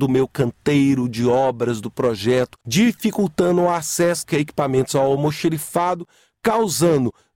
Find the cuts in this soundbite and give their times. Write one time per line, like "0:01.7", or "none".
0:02.6
0:04.2